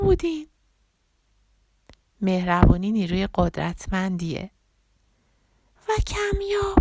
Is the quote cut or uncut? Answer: uncut